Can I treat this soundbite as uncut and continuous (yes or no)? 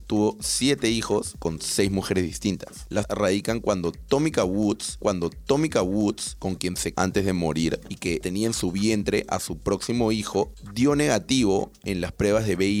no